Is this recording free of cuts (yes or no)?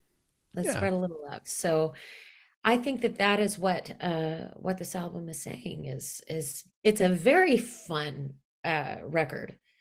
yes